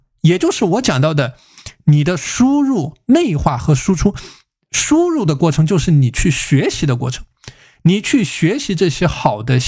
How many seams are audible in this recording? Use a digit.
0